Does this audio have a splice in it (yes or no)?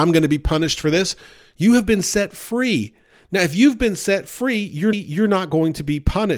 yes